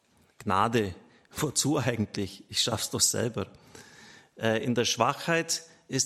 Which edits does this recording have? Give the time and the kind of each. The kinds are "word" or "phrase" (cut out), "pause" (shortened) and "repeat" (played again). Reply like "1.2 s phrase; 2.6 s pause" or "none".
none